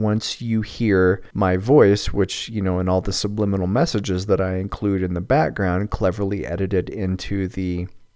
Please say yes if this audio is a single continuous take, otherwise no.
no